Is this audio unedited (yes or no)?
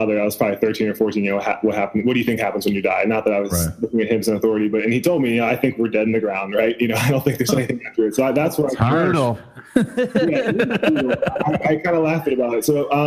yes